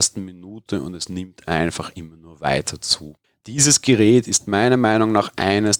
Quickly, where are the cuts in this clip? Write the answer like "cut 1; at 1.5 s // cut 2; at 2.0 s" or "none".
cut 1; at 3.2 s